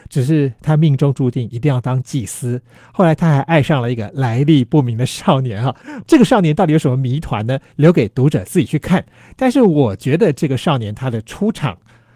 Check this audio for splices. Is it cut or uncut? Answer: uncut